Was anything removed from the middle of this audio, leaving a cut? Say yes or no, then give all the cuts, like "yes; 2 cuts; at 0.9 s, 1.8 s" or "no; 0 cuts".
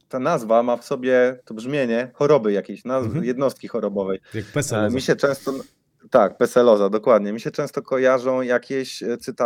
no; 0 cuts